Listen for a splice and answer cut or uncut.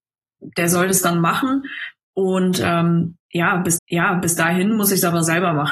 cut